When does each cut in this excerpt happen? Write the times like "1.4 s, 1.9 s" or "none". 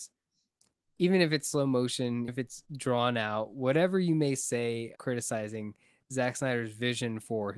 2.3 s, 5.0 s